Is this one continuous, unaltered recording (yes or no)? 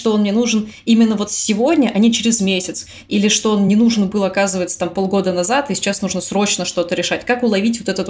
yes